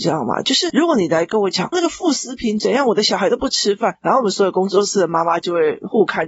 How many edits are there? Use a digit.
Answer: 1